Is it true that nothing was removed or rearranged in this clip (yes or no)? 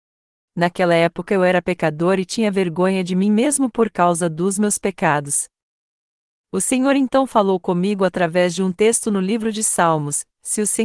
yes